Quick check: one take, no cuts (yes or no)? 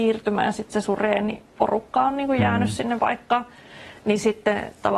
no